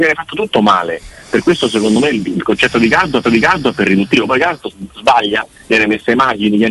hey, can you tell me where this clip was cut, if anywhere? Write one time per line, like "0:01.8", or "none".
0:03.2